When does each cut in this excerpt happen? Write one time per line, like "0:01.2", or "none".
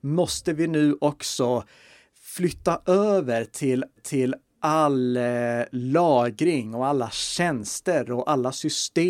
0:04.0